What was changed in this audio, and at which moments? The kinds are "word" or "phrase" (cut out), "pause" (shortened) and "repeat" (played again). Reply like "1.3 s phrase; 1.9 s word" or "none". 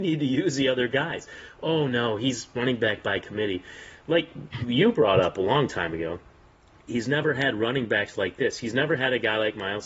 none